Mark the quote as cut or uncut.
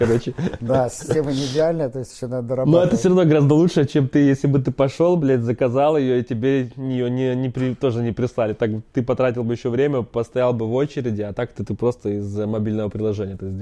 uncut